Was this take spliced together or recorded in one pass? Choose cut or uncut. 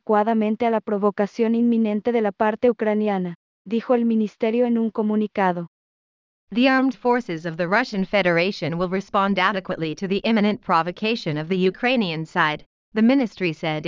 uncut